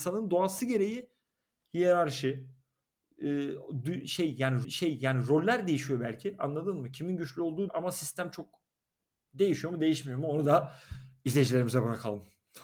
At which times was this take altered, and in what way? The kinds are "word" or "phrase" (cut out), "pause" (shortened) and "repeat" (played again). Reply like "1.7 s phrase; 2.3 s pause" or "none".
4.6 s repeat; 7.7 s word